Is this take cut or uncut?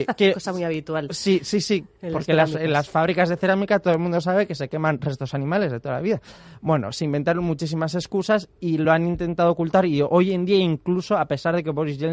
uncut